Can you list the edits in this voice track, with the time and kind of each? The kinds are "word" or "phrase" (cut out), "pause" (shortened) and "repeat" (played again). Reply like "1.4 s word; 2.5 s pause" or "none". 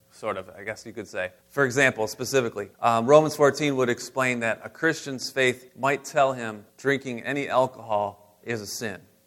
1.4 s pause; 2.7 s pause; 5.7 s pause; 6.7 s pause